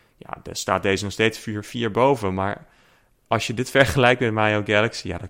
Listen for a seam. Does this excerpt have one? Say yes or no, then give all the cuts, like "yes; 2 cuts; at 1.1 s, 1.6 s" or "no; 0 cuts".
no; 0 cuts